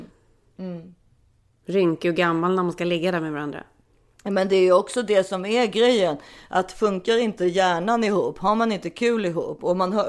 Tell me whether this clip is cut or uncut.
uncut